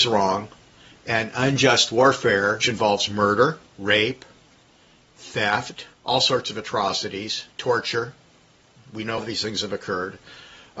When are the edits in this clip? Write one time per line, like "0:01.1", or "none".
0:02.6
0:03.7
0:05.9
0:07.5
0:09.2

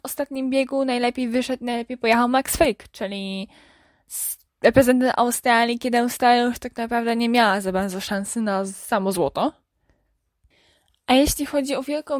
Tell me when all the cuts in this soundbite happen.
none

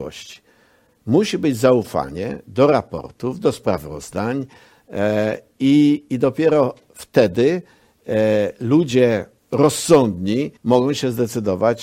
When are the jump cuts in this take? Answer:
0:10.6

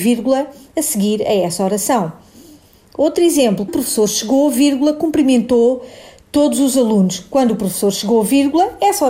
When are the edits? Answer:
0:03.7

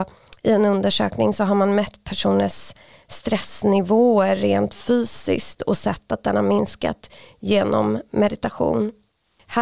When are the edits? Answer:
none

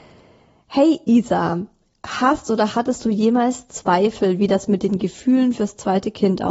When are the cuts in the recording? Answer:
none

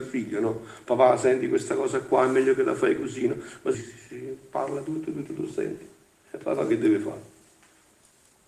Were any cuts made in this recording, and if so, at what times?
0:03.7
0:05.3

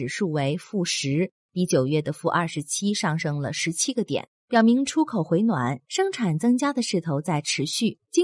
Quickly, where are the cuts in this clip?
0:04.4

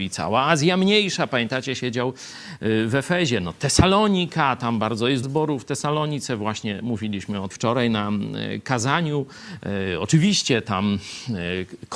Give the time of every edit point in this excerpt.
0:05.2
0:07.5

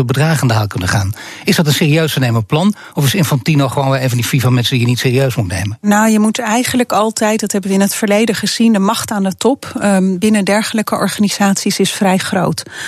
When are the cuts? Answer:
none

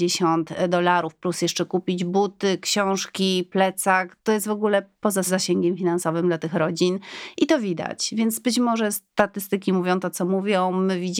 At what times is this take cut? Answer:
none

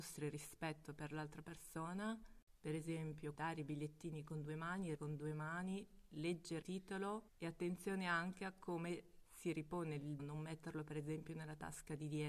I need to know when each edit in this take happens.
0:03.3
0:05.0
0:06.6
0:07.3
0:10.2

